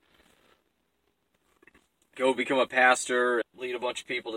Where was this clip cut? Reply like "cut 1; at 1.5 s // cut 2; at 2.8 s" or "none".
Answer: cut 1; at 2.1 s // cut 2; at 3.4 s